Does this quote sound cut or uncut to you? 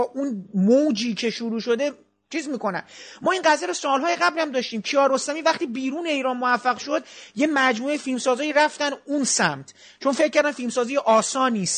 uncut